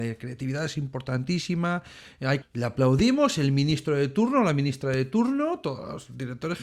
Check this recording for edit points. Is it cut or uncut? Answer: cut